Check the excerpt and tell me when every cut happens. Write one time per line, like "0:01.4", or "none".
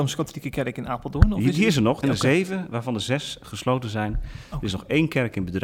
0:02.0